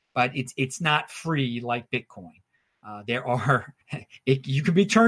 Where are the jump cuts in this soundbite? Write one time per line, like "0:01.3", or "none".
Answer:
0:03.8